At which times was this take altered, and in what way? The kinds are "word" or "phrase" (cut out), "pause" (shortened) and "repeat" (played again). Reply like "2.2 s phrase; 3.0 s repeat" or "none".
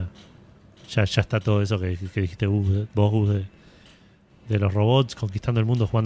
none